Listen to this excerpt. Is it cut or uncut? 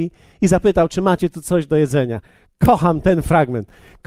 uncut